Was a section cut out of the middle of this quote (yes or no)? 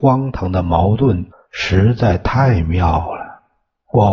yes